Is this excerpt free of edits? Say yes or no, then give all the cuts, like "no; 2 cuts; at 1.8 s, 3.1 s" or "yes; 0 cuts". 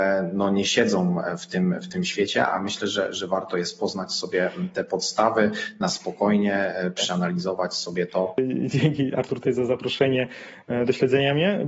yes; 0 cuts